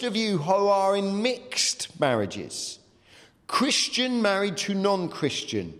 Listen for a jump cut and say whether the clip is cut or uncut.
uncut